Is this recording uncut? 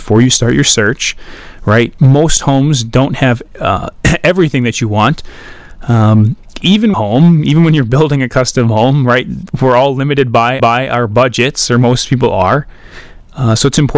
no; 2 cuts; at 6.9 s, 10.6 s

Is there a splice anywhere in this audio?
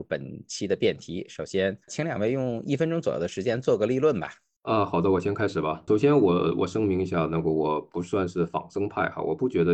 no; 0 cuts

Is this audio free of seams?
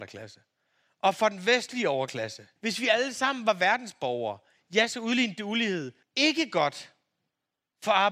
no; 2 cuts; at 2.6 s, 6.0 s

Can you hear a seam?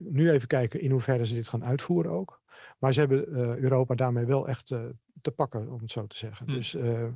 no; 0 cuts

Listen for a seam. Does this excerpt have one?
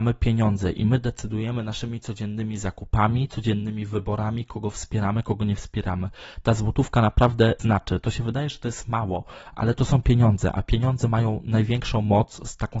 yes; 1 cut; at 7.6 s

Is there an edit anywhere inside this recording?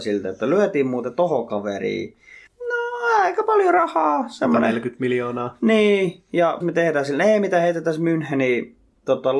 yes; 2 cuts; at 2.5 s, 6.6 s

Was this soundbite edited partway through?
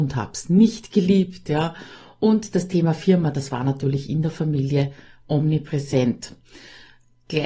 no; 0 cuts

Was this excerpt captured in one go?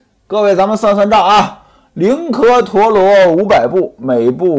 yes; 0 cuts

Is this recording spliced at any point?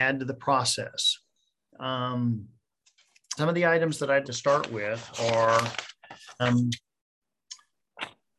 yes; 3 cuts; at 3.4 s, 4.2 s, 6.4 s

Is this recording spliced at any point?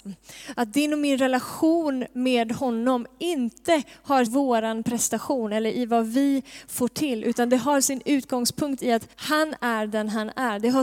yes; 2 cuts; at 4.3 s, 9.1 s

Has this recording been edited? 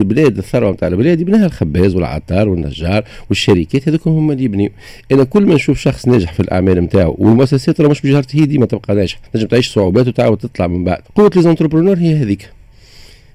yes; 2 cuts; at 9.3 s, 11.0 s

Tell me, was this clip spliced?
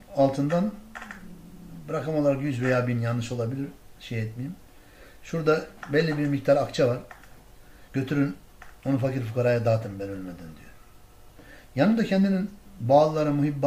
yes; 2 cuts; at 4.0 s, 7.9 s

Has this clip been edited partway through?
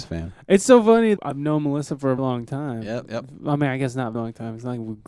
yes; 3 cuts; at 1.2 s, 2.2 s, 4.1 s

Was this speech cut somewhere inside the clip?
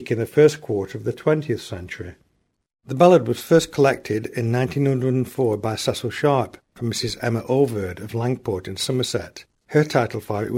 no; 0 cuts

